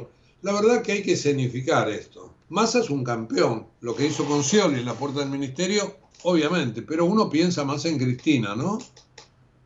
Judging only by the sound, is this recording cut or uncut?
cut